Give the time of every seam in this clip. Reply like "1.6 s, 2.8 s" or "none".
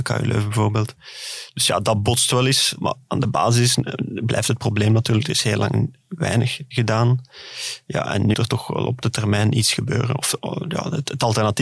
6.7 s, 8.3 s, 9.0 s